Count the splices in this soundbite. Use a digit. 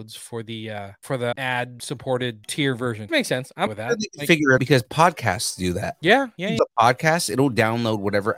5